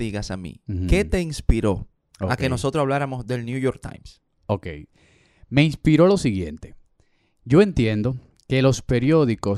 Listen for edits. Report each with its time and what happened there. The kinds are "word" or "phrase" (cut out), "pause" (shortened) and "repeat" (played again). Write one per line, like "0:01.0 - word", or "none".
none